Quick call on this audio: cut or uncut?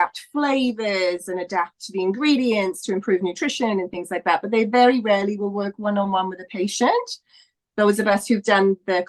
uncut